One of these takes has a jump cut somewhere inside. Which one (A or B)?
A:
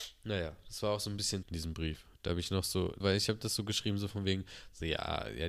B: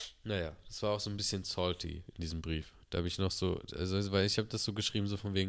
A